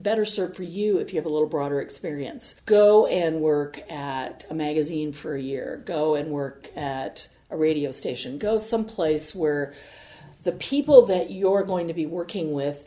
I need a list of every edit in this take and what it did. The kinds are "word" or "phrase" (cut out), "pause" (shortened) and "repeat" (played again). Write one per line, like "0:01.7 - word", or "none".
0:02.6 - pause